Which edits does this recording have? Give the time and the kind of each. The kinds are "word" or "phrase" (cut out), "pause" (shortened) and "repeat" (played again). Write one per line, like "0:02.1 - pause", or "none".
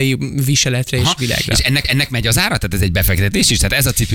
0:01.8 - repeat